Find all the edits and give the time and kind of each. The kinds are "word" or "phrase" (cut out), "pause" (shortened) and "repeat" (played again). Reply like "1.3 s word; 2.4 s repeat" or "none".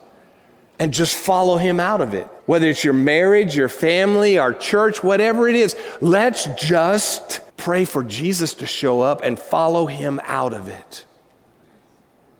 2.4 s pause; 7.5 s pause